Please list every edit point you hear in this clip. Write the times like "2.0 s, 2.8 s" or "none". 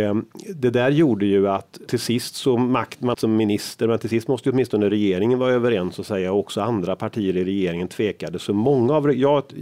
1.9 s, 3.1 s